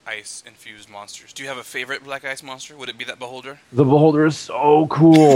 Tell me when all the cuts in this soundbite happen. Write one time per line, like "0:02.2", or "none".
0:03.6